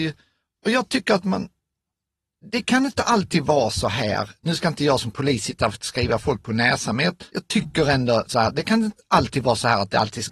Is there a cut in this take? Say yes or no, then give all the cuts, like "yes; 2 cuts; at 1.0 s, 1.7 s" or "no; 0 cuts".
yes; 1 cut; at 7.3 s